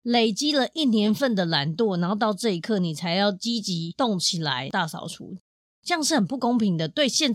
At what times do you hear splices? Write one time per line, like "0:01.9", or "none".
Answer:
none